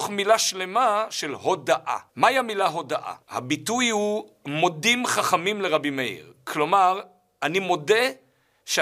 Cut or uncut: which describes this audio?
cut